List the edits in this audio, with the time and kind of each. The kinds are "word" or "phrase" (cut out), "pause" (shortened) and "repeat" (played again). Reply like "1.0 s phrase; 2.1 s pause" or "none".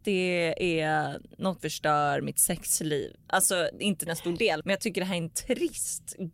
1.6 s word; 4.1 s word; 4.6 s word